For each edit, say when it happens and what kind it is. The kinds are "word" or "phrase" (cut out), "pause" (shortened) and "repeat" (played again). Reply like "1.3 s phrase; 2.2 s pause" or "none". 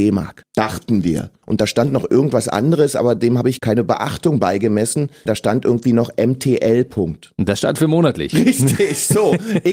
none